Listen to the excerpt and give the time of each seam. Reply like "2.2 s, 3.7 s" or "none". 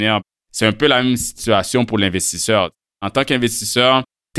none

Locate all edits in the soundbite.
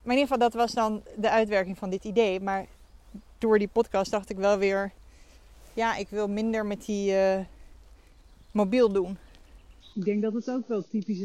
none

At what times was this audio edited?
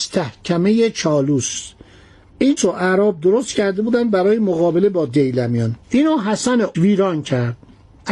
2.6 s, 5.8 s, 6.7 s

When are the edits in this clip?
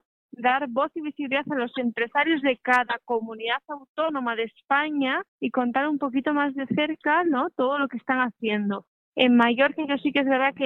5.3 s

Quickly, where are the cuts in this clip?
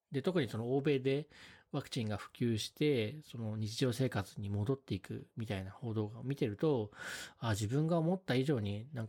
none

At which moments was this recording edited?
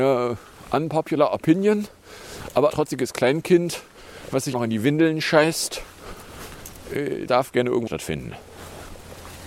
2.7 s, 4.5 s, 7.3 s, 7.9 s

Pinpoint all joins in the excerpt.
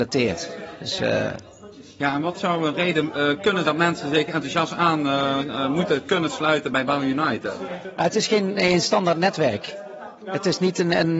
3.6 s

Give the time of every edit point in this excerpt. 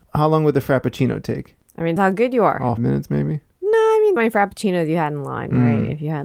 2.0 s, 2.8 s, 4.2 s

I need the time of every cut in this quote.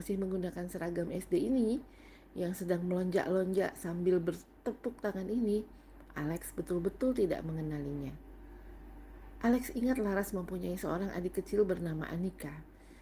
none

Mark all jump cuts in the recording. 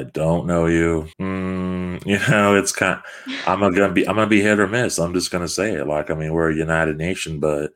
1.1 s

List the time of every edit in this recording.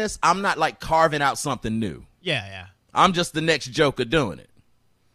none

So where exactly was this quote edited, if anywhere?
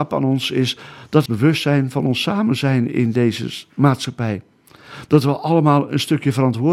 1.3 s

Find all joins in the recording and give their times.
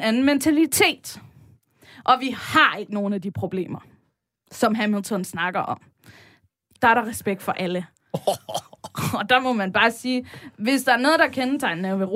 6.8 s

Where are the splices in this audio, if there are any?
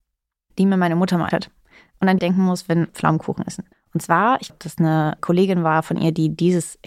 1.3 s, 2.2 s, 2.9 s, 3.7 s, 4.5 s, 5.2 s

